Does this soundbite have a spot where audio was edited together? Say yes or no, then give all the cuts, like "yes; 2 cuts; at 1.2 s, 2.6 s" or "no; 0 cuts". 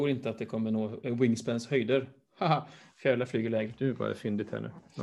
no; 0 cuts